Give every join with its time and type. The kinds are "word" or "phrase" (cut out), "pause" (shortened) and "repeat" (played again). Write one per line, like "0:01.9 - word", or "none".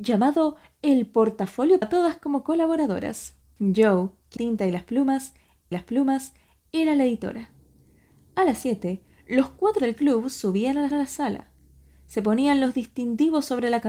0:01.8 - phrase
0:03.4 - pause
0:04.4 - phrase
0:05.7 - repeat
0:09.8 - word
0:10.9 - repeat